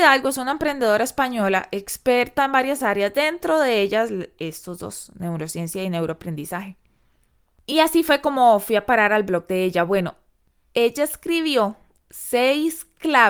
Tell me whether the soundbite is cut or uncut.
uncut